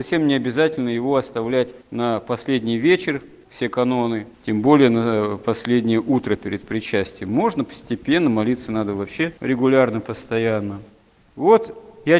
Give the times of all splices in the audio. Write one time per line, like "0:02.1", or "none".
0:01.8
0:04.3
0:09.4

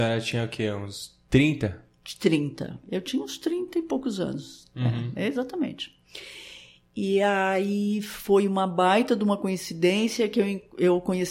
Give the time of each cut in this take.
0:01.2

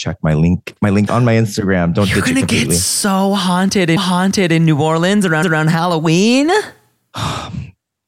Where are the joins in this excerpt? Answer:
0:01.1
0:04.0
0:05.4

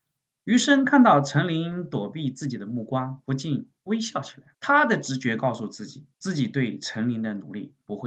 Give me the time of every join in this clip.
0:03.8
0:04.5
0:06.1

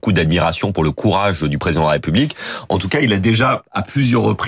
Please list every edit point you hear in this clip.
none

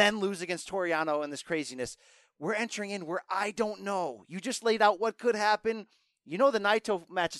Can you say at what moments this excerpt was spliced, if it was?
none

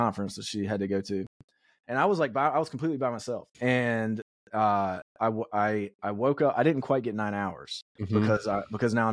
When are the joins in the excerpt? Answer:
0:03.5

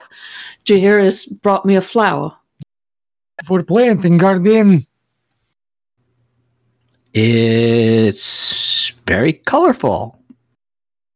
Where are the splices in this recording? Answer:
none

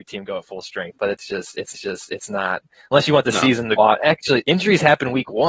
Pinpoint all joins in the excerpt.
0:01.7
0:03.8

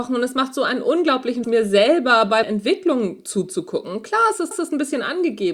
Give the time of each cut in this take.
0:01.4
0:02.4
0:04.5

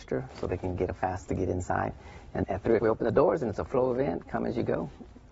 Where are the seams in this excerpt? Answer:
0:01.2
0:02.4
0:02.8
0:03.7

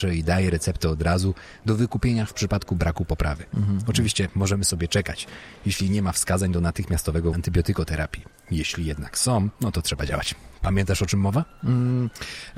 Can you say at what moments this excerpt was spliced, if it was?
0:07.3
0:09.5

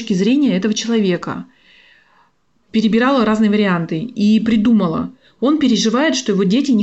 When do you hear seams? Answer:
none

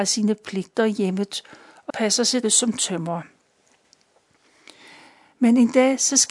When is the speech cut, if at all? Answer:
0:01.9
0:02.4

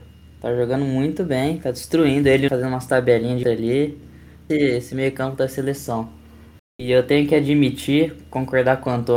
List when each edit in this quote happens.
0:02.5
0:03.4
0:04.5

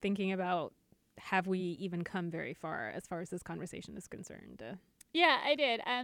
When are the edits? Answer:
none

